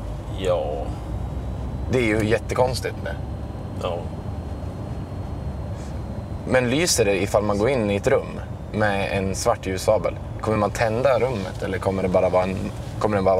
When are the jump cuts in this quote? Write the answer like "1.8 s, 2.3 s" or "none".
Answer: none